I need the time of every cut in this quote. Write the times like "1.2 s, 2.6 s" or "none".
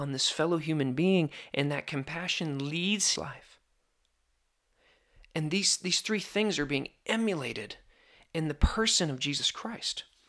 3.2 s